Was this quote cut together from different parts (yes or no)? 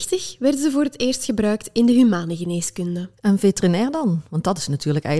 yes